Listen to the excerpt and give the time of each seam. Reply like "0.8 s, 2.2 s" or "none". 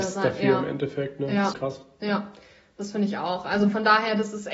1.5 s